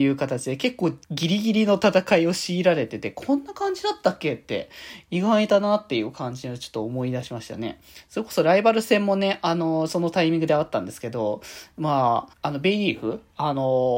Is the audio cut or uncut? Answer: cut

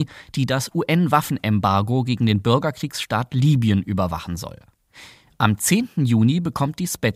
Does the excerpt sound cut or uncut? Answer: uncut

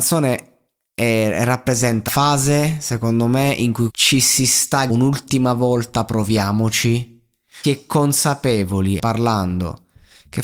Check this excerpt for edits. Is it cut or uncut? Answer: cut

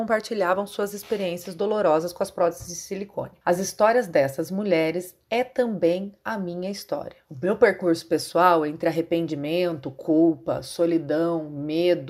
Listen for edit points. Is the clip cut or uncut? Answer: uncut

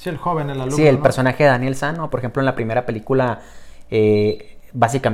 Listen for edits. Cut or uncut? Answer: uncut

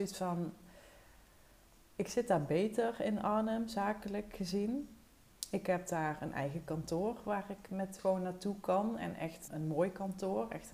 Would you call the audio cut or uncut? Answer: cut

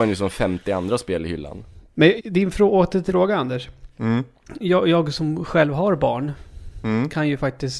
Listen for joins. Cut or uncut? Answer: cut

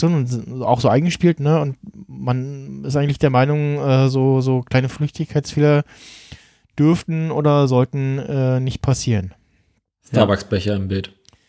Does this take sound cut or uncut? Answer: uncut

